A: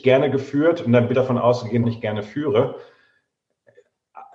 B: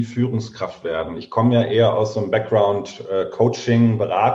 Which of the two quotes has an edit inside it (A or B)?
A